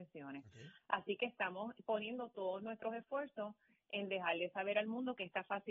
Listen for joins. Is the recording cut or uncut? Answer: uncut